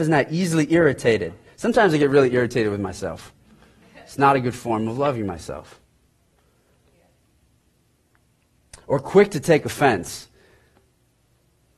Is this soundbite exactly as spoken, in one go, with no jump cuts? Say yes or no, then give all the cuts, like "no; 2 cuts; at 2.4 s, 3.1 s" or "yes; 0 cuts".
yes; 0 cuts